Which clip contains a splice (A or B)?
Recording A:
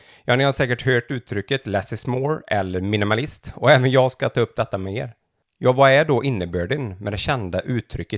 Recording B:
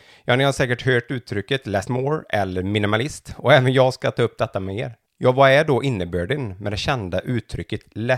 B